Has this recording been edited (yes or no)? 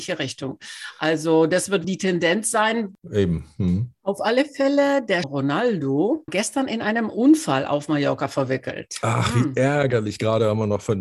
yes